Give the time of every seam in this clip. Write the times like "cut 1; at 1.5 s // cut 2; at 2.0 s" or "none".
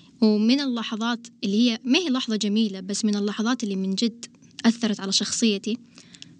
none